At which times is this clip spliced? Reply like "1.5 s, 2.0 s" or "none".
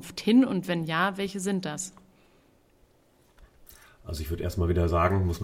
none